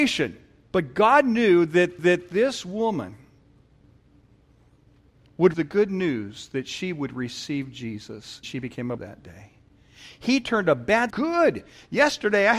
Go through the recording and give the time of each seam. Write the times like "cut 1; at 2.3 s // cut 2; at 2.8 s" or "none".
cut 1; at 2.0 s // cut 2; at 5.5 s // cut 3; at 8.4 s // cut 4; at 9.0 s // cut 5; at 11.1 s